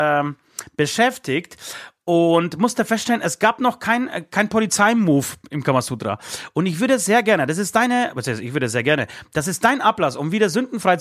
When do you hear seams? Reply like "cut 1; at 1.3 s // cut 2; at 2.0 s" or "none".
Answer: none